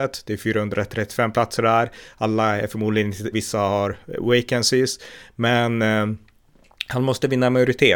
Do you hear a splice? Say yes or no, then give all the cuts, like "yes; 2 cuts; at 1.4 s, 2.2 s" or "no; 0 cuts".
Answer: yes; 1 cut; at 3.3 s